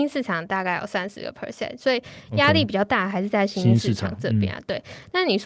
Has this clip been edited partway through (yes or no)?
no